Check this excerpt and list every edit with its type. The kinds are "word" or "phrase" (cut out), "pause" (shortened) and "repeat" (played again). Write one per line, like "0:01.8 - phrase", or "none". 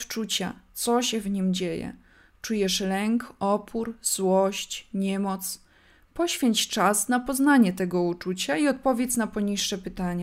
none